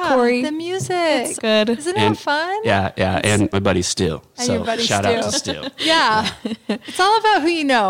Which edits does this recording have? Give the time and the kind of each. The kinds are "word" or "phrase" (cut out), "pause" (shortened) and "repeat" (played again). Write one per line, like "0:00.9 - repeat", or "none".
0:01.4 - word
0:03.5 - word